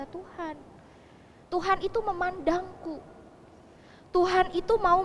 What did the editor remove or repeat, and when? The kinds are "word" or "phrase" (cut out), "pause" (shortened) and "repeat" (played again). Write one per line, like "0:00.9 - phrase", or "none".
none